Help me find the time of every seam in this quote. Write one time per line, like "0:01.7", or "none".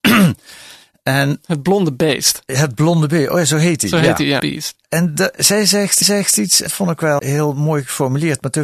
0:04.4
0:06.0
0:06.7
0:07.2